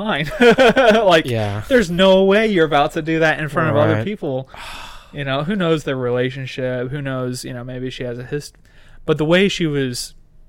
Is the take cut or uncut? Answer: uncut